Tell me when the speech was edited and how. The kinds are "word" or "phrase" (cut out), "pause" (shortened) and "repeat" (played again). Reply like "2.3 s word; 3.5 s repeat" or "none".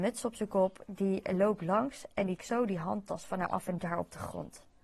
2.4 s word; 3.8 s word